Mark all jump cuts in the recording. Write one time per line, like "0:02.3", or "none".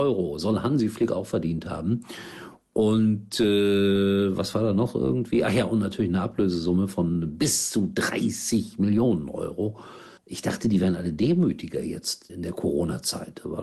0:10.2
0:12.3